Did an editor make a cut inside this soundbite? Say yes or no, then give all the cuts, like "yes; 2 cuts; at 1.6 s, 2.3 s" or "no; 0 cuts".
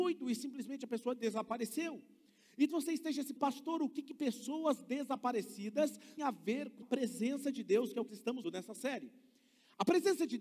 yes; 6 cuts; at 2.7 s, 3.4 s, 6.2 s, 6.8 s, 8.1 s, 8.4 s